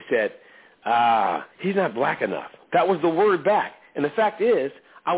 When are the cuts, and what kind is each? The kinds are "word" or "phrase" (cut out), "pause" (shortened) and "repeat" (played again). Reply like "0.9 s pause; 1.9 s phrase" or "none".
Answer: 1.5 s pause